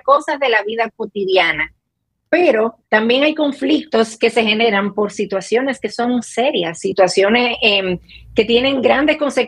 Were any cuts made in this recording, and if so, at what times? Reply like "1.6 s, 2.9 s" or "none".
2.8 s